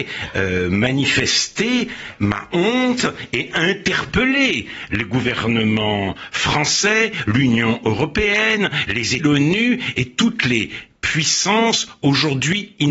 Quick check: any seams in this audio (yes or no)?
yes